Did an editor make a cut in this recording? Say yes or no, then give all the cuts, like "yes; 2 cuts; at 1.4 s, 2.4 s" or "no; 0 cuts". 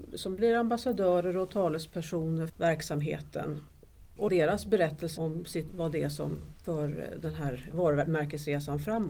yes; 4 cuts; at 2.5 s, 4.3 s, 5.2 s, 5.7 s